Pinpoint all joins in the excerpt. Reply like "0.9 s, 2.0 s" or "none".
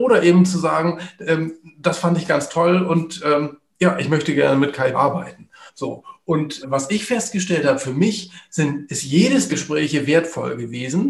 4.9 s, 5.7 s, 6.6 s, 9.5 s